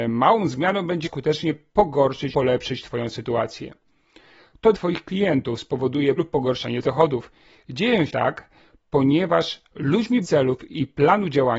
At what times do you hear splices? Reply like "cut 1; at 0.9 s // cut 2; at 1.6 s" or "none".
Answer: cut 1; at 1.0 s // cut 2; at 2.3 s // cut 3; at 4.7 s // cut 4; at 6.2 s // cut 5; at 6.8 s // cut 6; at 8.1 s // cut 7; at 10.2 s